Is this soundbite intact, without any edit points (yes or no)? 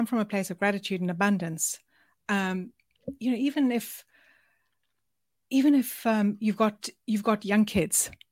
yes